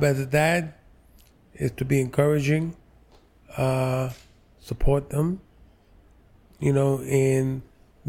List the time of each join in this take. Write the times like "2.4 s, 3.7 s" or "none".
none